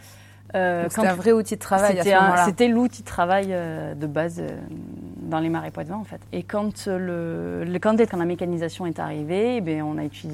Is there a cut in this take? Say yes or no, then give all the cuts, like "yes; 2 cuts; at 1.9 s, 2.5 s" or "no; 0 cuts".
yes; 1 cut; at 8.1 s